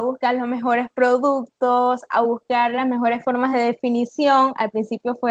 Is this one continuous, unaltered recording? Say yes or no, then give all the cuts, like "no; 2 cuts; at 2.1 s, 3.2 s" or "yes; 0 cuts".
yes; 0 cuts